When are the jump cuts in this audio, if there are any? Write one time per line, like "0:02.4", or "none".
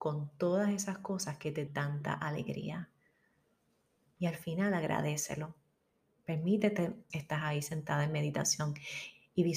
0:01.7
0:07.1